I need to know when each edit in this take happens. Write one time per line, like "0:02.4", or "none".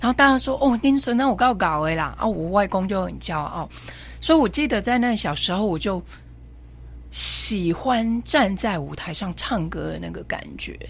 none

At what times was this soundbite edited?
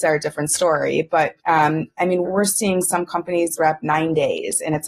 0:01.4
0:02.2
0:03.6

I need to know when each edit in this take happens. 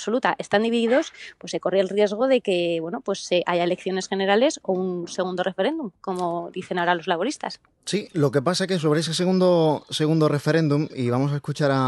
none

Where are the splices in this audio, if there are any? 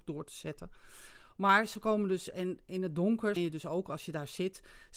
0:03.4

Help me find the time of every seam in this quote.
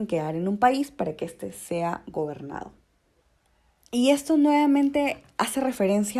none

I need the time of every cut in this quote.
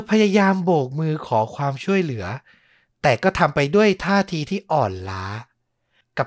none

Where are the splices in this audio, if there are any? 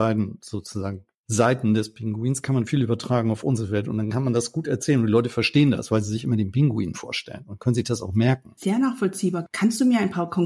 none

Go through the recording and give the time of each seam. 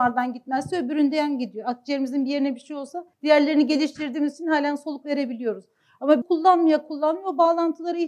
0:03.1
0:05.0
0:06.2

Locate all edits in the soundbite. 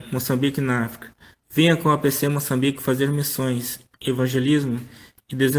none

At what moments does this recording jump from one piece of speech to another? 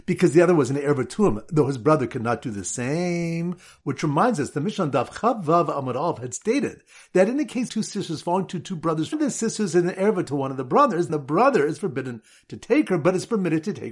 0:07.7
0:09.1
0:11.1

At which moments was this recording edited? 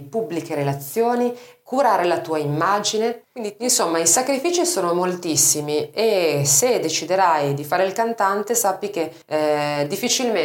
0:03.2
0:09.2

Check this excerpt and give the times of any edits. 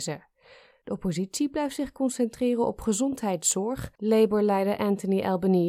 0:03.9

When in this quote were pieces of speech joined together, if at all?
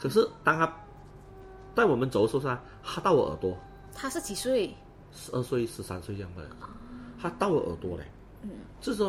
none

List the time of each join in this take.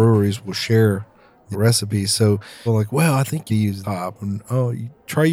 0:01.5
0:02.7
0:03.5
0:03.8

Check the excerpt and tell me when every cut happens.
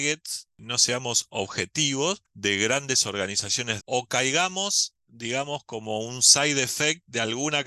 0:03.8

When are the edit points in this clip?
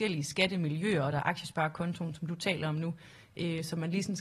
none

